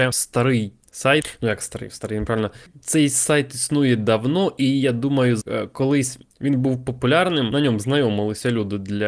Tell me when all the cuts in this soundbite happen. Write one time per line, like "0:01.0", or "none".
none